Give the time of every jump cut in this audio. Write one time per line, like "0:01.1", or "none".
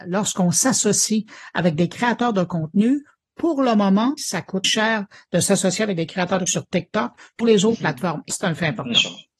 0:04.2
0:04.6
0:06.5
0:07.4
0:08.3